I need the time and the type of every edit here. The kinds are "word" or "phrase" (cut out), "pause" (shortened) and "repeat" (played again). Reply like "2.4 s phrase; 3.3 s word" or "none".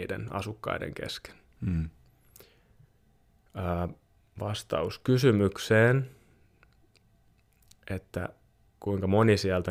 none